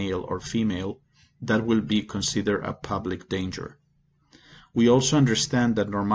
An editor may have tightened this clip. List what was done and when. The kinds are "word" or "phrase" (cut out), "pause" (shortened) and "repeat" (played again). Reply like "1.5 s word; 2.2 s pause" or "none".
none